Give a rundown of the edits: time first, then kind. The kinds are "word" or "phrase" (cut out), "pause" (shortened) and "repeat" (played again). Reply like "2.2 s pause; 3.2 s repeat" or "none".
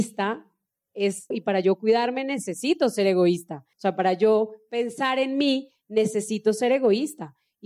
1.3 s word; 3.7 s pause